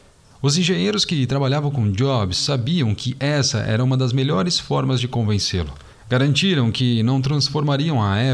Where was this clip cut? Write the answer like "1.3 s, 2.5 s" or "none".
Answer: 5.9 s